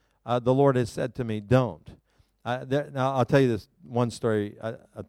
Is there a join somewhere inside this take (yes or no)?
no